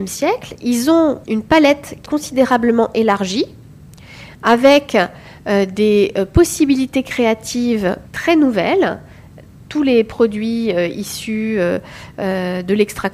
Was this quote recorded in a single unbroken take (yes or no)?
no